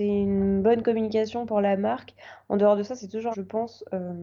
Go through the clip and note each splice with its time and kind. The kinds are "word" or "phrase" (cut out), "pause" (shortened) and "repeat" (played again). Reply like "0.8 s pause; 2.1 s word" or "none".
3.3 s word